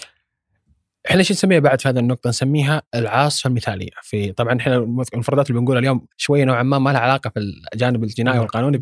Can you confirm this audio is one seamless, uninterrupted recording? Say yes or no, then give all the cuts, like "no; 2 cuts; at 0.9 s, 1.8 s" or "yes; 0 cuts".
no; 1 cut; at 6.1 s